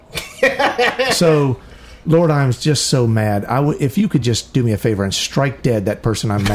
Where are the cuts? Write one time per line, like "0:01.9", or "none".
none